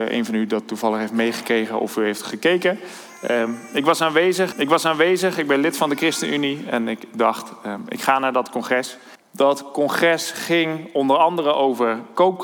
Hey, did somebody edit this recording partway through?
yes; 2 cuts; at 4.5 s, 9.2 s

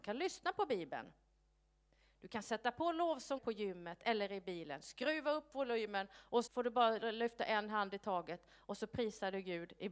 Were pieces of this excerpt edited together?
yes; 2 cuts; at 3.4 s, 6.5 s

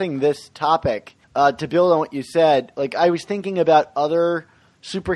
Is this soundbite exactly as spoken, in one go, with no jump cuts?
no; 1 cut; at 1.2 s

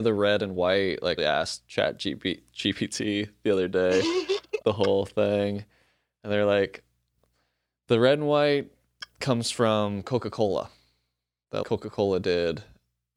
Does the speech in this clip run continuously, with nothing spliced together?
no; 3 cuts; at 1.2 s, 4.6 s, 11.6 s

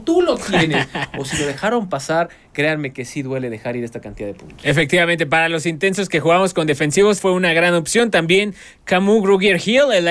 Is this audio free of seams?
no; 1 cut; at 7.2 s

